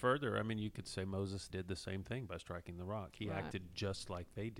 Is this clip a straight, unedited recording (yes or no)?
no